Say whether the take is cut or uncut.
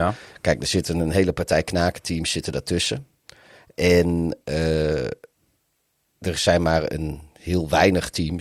uncut